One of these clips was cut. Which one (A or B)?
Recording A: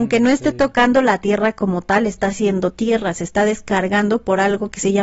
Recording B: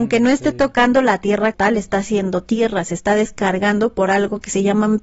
B